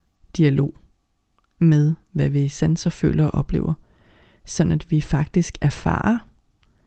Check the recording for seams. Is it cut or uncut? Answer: uncut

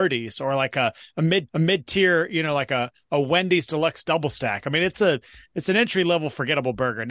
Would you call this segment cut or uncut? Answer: cut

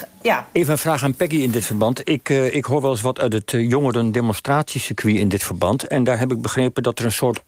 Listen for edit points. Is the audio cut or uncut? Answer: uncut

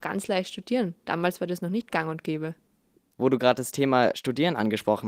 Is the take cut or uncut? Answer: uncut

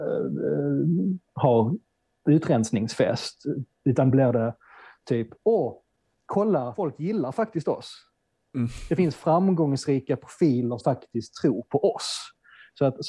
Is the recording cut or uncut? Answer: cut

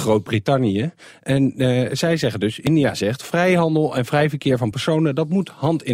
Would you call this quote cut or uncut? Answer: uncut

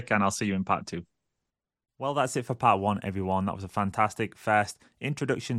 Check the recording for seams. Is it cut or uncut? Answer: uncut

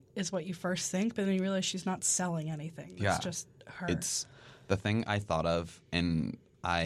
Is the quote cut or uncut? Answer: uncut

